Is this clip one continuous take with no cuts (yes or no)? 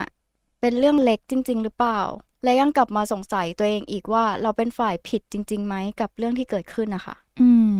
yes